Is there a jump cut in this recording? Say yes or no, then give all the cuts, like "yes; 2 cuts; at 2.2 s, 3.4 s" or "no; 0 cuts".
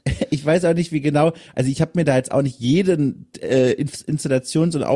no; 0 cuts